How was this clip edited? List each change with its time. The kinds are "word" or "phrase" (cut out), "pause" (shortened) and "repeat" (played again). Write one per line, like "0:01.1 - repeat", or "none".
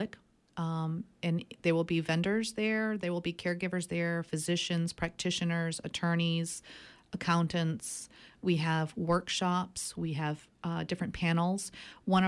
none